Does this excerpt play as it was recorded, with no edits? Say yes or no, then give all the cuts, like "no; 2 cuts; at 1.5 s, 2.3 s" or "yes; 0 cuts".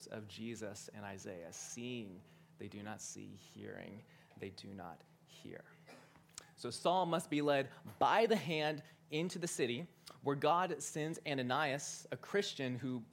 yes; 0 cuts